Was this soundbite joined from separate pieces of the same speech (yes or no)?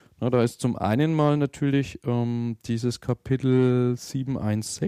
no